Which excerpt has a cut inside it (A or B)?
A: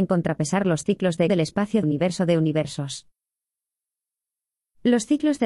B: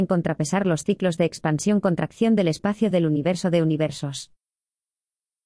A